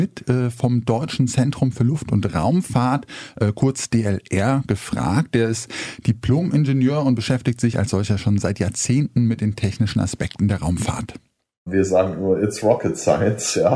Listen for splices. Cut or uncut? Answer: uncut